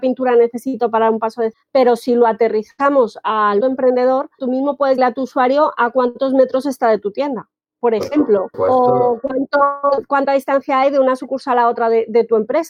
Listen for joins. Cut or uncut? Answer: cut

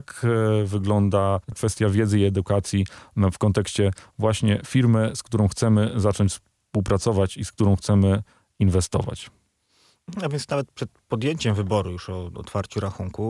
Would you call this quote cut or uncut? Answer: cut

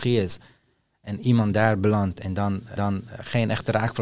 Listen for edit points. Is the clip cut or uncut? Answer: cut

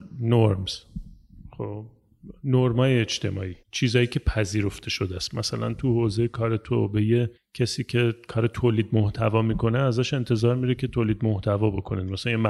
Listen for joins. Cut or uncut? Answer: cut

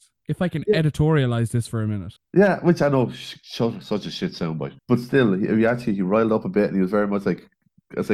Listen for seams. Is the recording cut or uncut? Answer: cut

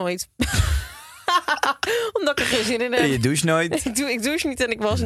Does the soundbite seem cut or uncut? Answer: uncut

